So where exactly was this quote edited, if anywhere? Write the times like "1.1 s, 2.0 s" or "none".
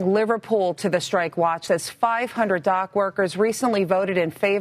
1.7 s